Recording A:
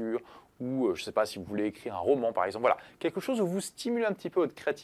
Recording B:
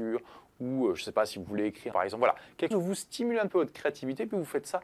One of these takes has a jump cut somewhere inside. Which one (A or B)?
B